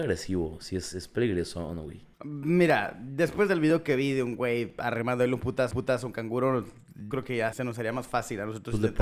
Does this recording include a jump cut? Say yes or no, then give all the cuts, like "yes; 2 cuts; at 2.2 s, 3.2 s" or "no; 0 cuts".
yes; 4 cuts; at 2.1 s, 5.7 s, 7.1 s, 7.5 s